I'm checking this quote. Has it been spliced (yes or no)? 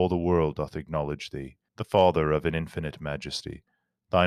yes